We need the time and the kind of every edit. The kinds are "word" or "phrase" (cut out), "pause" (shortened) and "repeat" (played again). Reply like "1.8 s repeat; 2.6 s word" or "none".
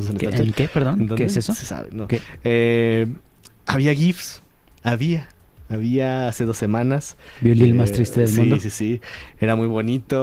none